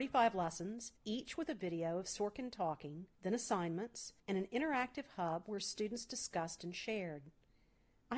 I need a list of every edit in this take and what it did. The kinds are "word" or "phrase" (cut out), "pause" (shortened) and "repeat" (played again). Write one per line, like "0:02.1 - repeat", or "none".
0:01.0 - pause
0:03.1 - pause
0:04.2 - pause